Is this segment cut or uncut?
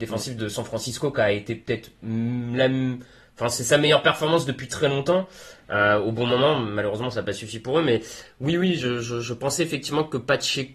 uncut